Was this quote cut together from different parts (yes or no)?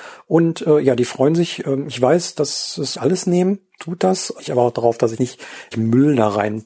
yes